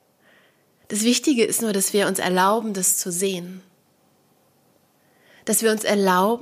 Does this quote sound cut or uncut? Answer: uncut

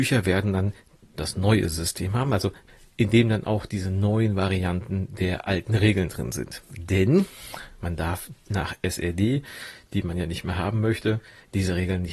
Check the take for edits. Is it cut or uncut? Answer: uncut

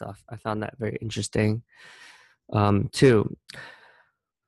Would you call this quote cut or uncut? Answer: uncut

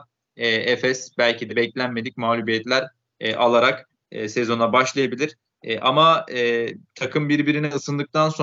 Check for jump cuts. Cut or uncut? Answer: cut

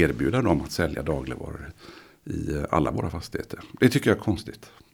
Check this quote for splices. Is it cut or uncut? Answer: uncut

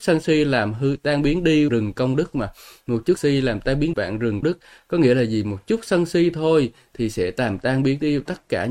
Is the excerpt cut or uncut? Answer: cut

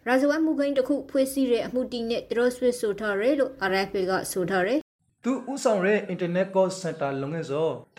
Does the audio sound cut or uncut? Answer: uncut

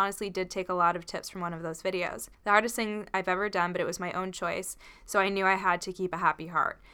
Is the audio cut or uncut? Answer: cut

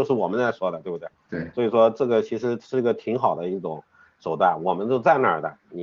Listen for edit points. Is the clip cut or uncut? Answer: uncut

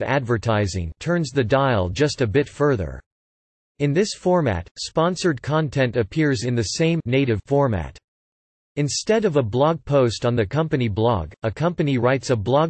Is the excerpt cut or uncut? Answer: uncut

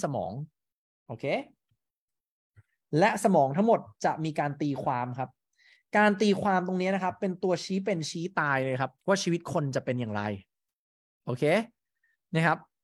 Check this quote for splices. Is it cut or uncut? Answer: cut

